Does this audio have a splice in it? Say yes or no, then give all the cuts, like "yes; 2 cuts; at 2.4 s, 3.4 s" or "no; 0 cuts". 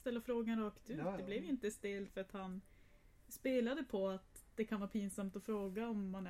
no; 0 cuts